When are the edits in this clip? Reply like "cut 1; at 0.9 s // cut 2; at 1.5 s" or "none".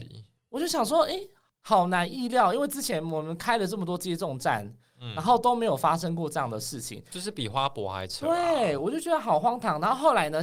none

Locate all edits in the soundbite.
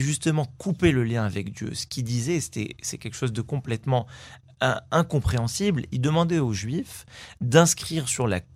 none

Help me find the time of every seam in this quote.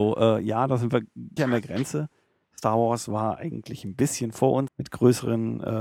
cut 1; at 1.4 s // cut 2; at 4.7 s

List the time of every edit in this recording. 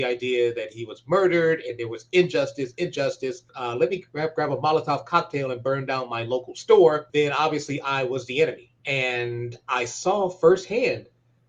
cut 1; at 3.5 s // cut 2; at 7.1 s // cut 3; at 8.8 s

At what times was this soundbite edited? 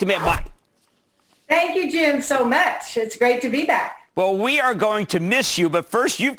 none

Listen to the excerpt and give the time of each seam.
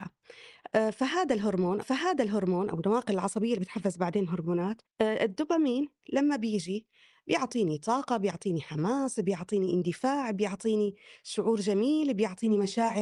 cut 1; at 1.8 s // cut 2; at 4.8 s

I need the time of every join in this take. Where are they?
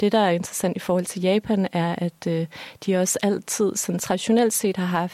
none

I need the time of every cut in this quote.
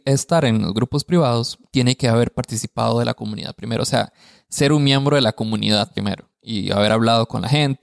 none

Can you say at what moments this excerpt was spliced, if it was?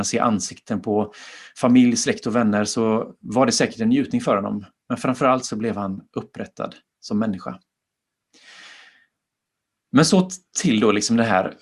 none

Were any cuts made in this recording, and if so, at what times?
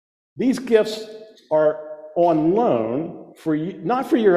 cut 1; at 1.3 s // cut 2; at 3.3 s

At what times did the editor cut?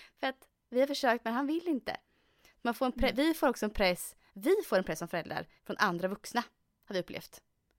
cut 1; at 5.6 s

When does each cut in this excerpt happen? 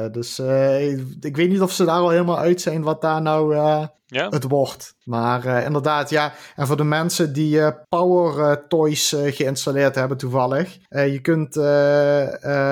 cut 1; at 4.0 s // cut 2; at 5.0 s // cut 3; at 7.8 s // cut 4; at 10.9 s

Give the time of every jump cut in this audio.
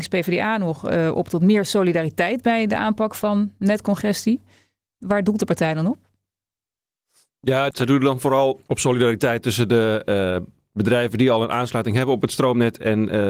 none

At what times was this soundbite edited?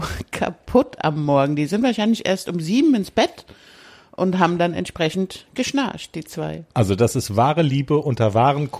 none

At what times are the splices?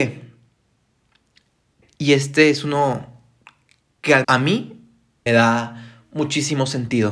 cut 1; at 4.2 s // cut 2; at 5.3 s

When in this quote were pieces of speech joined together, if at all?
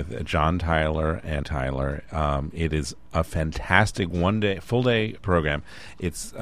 cut 1; at 1.4 s // cut 2; at 5.2 s

